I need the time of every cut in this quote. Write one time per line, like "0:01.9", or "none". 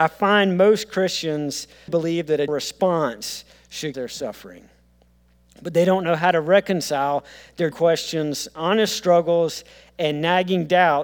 0:01.9
0:02.5
0:03.9
0:07.7